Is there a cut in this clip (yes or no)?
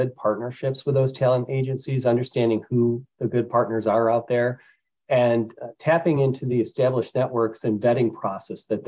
no